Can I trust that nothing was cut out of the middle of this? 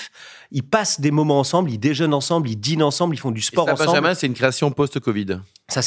yes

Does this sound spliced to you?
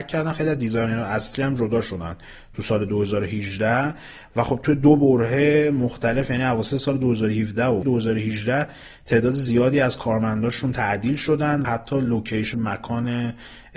yes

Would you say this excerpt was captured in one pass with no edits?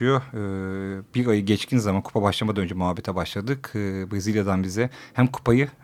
yes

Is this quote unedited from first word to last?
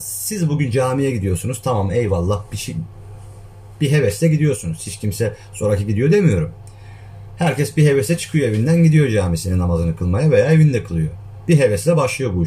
yes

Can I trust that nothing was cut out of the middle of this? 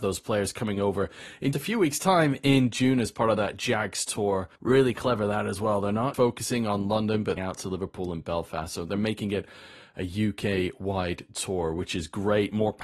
no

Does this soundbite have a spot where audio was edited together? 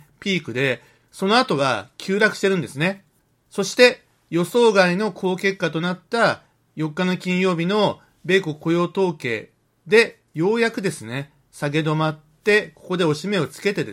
no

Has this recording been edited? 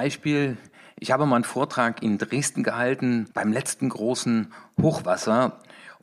yes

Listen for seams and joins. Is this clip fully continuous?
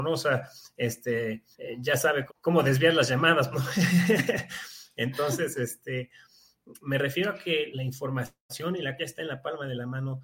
no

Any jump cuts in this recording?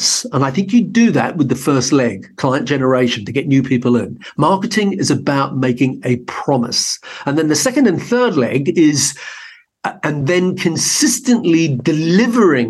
no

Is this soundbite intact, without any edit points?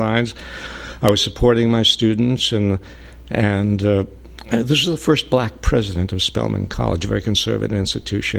yes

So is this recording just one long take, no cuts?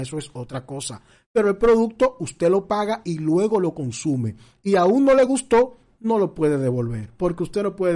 yes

